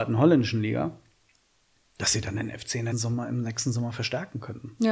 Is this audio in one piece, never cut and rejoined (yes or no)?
no